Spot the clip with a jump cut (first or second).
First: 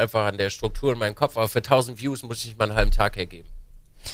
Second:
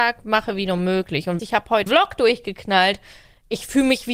second